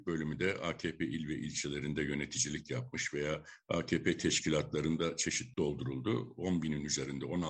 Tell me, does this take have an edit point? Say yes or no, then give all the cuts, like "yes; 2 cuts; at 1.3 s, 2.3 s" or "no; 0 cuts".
yes; 1 cut; at 5.5 s